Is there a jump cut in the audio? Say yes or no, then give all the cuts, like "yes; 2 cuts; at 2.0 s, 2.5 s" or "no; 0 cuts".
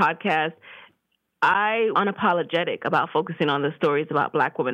yes; 1 cut; at 1.9 s